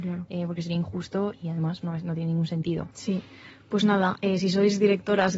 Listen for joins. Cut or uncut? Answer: cut